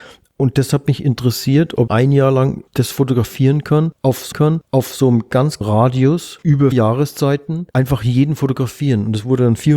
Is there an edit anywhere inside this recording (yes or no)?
yes